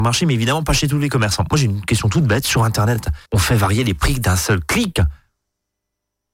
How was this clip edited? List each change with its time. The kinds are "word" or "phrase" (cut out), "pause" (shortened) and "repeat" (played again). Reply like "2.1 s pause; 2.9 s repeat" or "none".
3.3 s pause